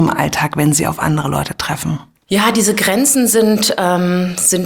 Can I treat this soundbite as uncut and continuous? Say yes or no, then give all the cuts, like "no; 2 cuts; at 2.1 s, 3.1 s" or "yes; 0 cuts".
yes; 0 cuts